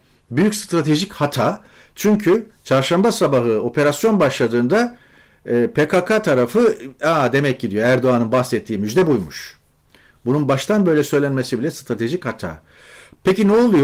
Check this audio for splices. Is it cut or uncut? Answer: uncut